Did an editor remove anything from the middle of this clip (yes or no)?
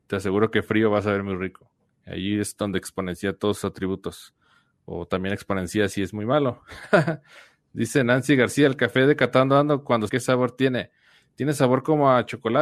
yes